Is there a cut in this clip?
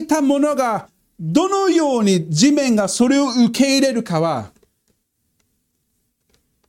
no; 0 cuts

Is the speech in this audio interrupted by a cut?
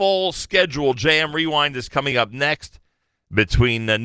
no; 0 cuts

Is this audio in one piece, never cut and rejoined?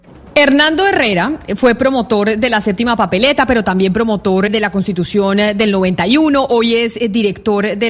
no; 1 cut; at 4.5 s

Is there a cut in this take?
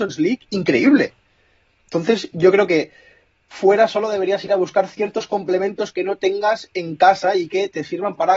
no; 0 cuts

